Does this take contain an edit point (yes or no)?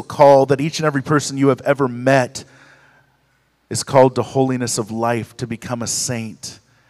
no